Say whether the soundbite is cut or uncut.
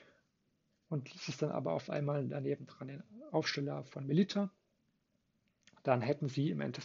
uncut